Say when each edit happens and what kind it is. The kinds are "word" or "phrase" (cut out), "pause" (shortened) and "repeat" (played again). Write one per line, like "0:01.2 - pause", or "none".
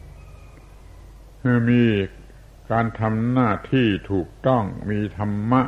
none